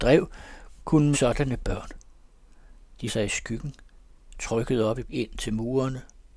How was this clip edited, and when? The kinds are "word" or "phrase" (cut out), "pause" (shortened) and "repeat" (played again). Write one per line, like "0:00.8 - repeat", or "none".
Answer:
0:01.1 - word
0:03.1 - word
0:05.0 - word